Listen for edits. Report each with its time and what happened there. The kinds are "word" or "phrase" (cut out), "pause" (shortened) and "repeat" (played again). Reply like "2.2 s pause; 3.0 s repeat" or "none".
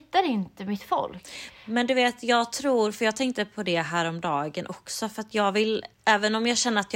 5.9 s pause